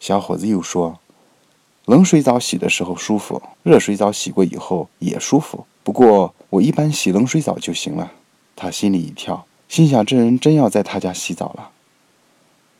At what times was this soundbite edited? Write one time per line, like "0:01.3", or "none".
0:03.5
0:04.9
0:05.7
0:06.4
0:08.2
0:09.6

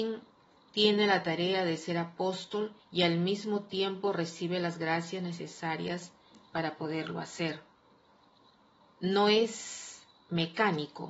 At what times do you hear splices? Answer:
0:02.8

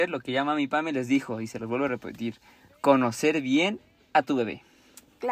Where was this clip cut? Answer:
none

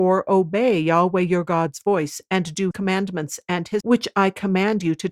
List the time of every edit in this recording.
0:02.7
0:03.8

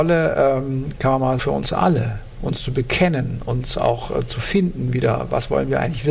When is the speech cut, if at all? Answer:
0:01.4

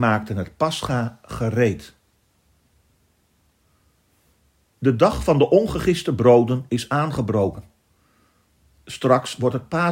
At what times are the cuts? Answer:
none

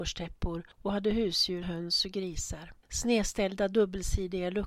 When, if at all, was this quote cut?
0:01.6
0:02.8

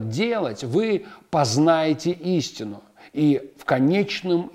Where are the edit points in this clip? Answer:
none

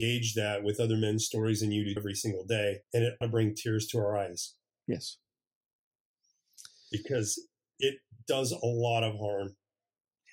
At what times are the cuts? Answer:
0:02.0
0:02.8
0:03.2

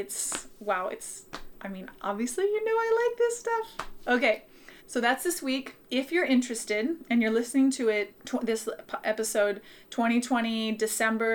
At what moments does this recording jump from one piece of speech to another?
0:04.8
0:05.8
0:08.2

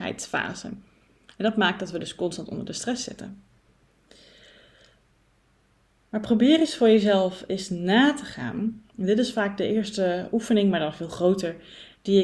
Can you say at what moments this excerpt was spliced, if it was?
none

